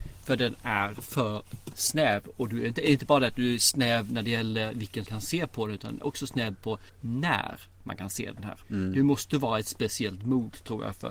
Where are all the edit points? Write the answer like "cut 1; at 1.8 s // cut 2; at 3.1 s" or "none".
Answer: cut 1; at 5.1 s // cut 2; at 6.9 s

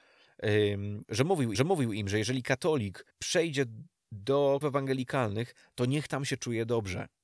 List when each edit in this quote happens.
cut 1; at 1.0 s // cut 2; at 1.5 s // cut 3; at 3.1 s // cut 4; at 4.6 s

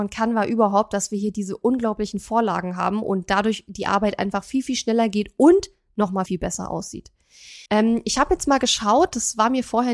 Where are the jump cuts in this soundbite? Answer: cut 1; at 6.3 s // cut 2; at 7.7 s

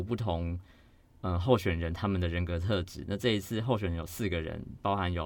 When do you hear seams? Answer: none

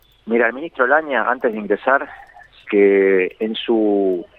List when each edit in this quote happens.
cut 1; at 2.6 s

